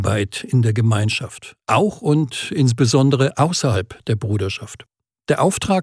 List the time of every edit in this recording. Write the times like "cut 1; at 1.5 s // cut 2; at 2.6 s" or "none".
cut 1; at 1.6 s